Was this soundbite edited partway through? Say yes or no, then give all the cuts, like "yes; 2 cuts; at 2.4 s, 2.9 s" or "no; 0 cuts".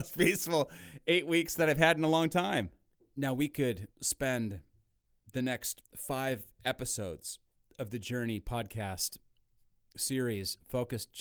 yes; 4 cuts; at 2.9 s, 3.9 s, 5.8 s, 7.5 s